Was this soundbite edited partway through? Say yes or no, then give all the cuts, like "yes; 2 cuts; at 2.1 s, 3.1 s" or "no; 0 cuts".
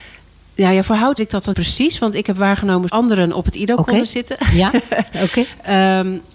yes; 3 cuts; at 1.2 s, 1.5 s, 2.9 s